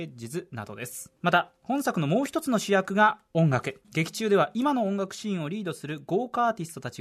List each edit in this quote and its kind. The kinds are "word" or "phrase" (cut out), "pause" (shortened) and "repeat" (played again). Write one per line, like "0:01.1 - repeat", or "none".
0:01.2 - pause
0:03.8 - pause